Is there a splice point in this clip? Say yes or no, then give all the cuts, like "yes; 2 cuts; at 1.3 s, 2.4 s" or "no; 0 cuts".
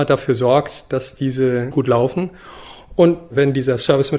yes; 1 cut; at 1.7 s